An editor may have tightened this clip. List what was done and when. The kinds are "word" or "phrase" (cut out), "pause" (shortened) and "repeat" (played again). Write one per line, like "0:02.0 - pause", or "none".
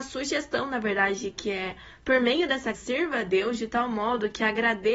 0:02.7 - word